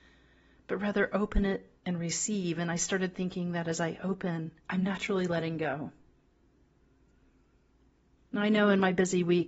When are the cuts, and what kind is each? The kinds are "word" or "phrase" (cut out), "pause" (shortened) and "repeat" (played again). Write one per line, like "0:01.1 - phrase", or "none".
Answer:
0:01.8 - pause
0:04.6 - pause